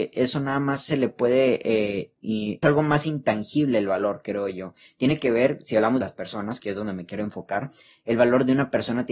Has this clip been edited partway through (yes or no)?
yes